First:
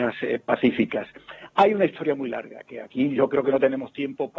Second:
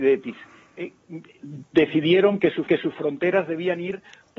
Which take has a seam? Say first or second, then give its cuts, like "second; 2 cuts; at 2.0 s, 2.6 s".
second; 1 cut; at 2.7 s